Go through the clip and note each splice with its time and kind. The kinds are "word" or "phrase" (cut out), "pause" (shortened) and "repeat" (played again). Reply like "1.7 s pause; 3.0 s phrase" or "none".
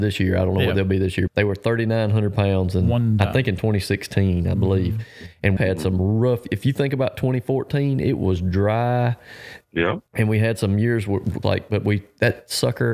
1.3 s word; 5.6 s word; 10.1 s pause; 11.4 s phrase